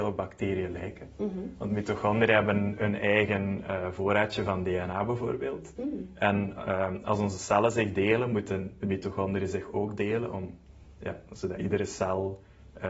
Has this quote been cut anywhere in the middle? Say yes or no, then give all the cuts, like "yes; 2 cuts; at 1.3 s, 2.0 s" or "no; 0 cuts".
no; 0 cuts